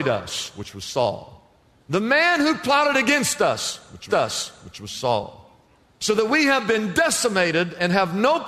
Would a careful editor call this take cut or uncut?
cut